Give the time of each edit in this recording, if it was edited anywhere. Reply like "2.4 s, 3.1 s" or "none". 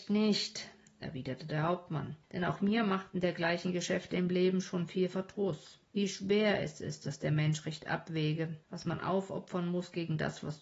2.2 s, 5.9 s, 8.6 s